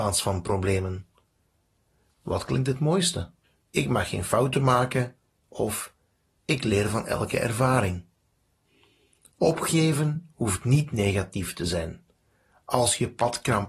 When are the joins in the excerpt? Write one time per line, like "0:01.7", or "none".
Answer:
0:03.4

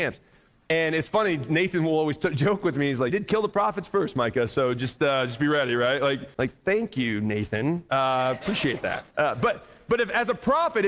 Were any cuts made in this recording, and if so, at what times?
0:03.1
0:06.3
0:09.1

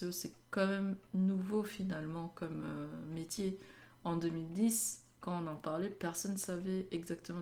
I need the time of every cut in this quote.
none

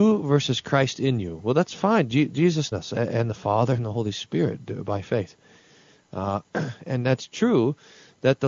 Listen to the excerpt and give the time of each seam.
0:02.7

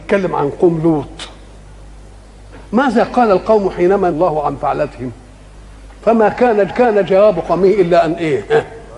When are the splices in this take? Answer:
0:02.7
0:04.1
0:06.7

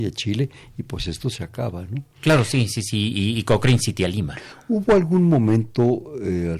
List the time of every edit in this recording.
none

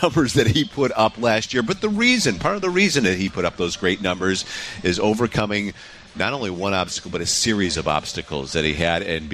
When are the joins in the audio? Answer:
none

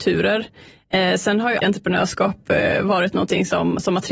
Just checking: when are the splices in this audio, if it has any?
0:01.6

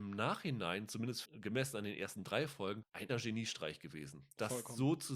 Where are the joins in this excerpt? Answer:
0:01.2
0:03.1

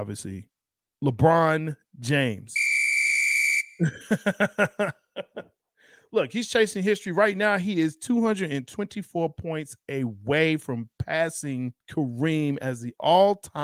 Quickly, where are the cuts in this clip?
0:11.8

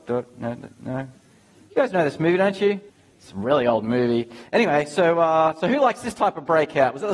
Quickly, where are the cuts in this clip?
0:02.9

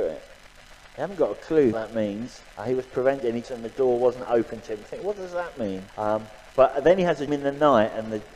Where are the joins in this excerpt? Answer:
0:01.7
0:02.5
0:03.4
0:05.9
0:07.3

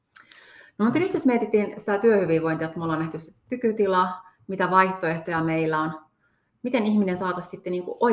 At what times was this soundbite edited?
none

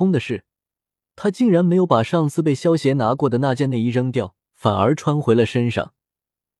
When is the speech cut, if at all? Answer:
0:04.4

